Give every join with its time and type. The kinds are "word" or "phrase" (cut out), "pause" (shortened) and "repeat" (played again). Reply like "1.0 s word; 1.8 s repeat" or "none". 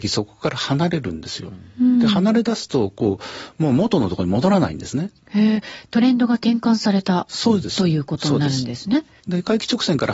9.2 s pause